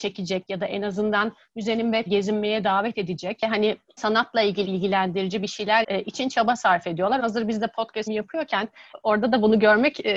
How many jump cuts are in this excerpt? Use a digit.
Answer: 6